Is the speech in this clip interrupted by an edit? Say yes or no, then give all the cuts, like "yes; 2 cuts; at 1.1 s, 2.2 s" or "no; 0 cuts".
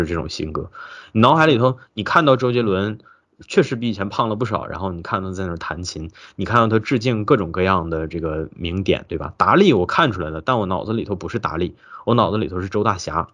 no; 0 cuts